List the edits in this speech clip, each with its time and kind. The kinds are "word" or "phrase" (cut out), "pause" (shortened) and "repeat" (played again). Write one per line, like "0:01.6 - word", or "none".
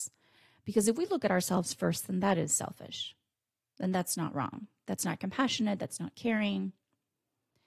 none